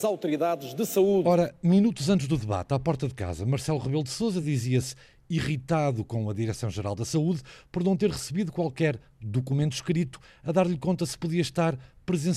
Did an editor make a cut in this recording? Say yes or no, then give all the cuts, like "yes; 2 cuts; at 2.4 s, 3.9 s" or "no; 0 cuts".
no; 0 cuts